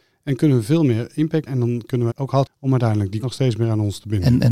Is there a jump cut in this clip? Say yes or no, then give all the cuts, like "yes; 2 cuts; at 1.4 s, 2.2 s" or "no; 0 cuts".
yes; 4 cuts; at 1.5 s, 2.1 s, 2.5 s, 3.2 s